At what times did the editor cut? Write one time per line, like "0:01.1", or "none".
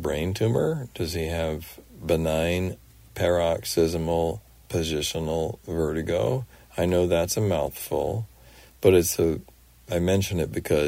none